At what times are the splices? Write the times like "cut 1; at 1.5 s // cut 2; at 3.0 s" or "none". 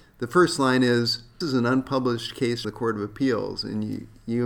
cut 1; at 1.4 s // cut 2; at 2.6 s